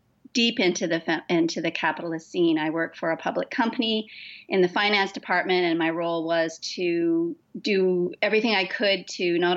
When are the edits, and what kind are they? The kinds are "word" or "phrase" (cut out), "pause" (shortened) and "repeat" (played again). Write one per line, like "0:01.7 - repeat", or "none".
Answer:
none